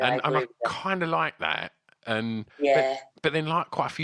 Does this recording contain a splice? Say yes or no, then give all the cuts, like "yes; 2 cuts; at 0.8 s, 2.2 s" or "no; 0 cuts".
yes; 1 cut; at 2.5 s